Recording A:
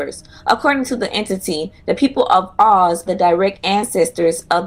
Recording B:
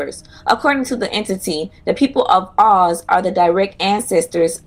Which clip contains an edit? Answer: A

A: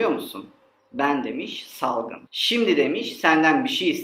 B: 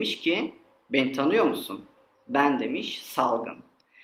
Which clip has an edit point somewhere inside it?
A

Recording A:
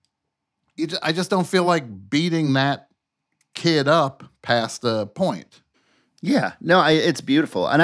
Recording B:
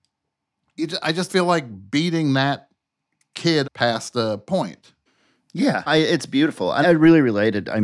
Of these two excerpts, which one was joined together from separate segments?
B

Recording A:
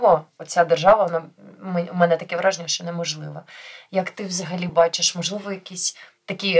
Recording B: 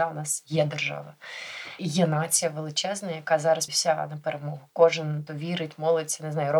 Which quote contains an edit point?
B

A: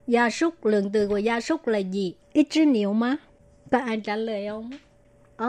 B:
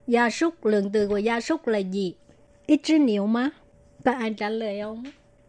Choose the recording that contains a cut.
A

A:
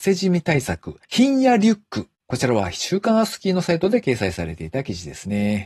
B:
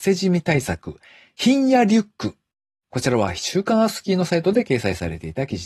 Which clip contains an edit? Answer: A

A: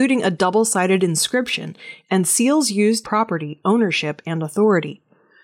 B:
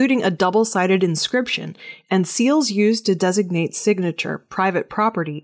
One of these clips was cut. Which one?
A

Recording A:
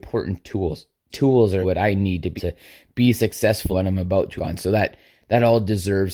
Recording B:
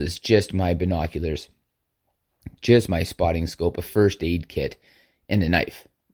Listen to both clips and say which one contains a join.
A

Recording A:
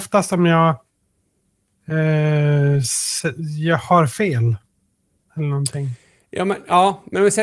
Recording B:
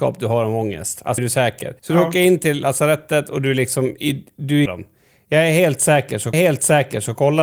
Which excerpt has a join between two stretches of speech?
B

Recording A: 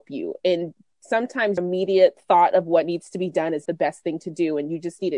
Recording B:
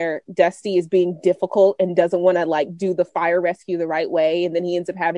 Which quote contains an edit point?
A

